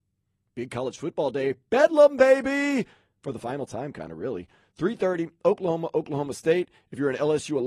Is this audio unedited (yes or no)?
yes